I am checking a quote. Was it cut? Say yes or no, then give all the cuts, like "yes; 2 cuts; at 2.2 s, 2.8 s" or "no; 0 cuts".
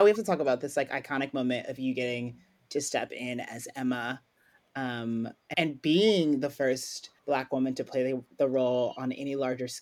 yes; 2 cuts; at 5.5 s, 7.2 s